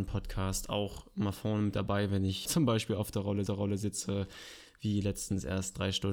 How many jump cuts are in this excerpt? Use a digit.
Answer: 2